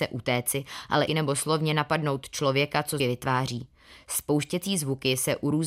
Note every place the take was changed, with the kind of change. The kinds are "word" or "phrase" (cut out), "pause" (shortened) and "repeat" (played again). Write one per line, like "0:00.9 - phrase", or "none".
0:01.1 - phrase
0:03.0 - word